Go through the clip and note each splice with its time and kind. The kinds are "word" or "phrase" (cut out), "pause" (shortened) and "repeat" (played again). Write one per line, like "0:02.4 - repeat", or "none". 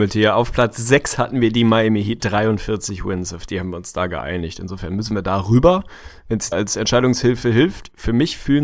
0:02.2 - word
0:06.5 - word